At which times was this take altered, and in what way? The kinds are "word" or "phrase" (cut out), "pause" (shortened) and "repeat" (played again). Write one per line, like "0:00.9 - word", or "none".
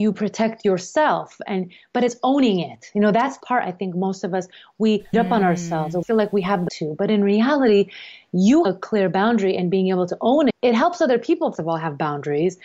0:03.4 - word
0:05.1 - word
0:06.0 - word
0:06.7 - word
0:08.6 - word
0:10.5 - word
0:11.5 - word